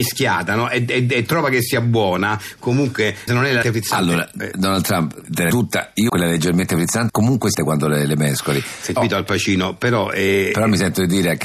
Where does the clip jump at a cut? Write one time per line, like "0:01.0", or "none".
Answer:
0:03.3
0:03.6
0:05.5
0:06.1
0:07.1
0:07.5
0:09.0